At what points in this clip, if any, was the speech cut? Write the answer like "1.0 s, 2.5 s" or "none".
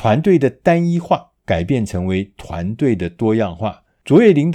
1.4 s

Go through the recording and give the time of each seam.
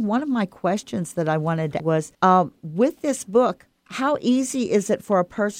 1.8 s, 2.1 s, 3.8 s

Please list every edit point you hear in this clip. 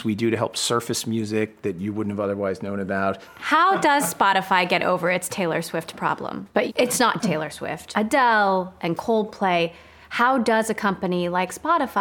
7.2 s

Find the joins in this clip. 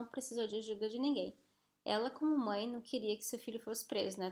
none

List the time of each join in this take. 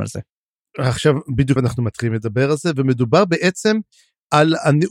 1.6 s

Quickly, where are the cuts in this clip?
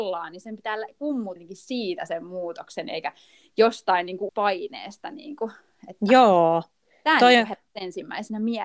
1.4 s, 4.3 s

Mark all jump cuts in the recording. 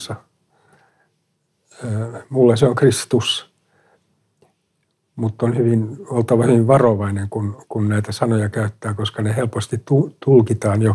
none

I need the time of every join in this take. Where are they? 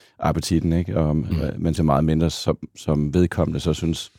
1.8 s

